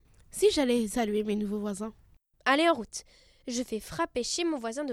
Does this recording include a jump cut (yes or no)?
no